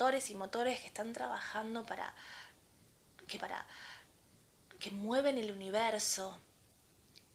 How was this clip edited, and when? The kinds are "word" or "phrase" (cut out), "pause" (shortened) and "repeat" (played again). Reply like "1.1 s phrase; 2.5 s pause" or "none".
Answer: 3.4 s repeat